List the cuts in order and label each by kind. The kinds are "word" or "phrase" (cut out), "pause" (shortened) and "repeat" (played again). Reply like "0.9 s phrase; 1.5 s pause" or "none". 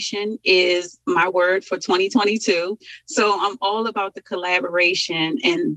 none